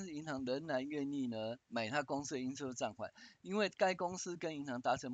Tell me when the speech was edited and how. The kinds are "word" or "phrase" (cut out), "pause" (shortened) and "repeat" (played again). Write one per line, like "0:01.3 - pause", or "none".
0:01.6 - pause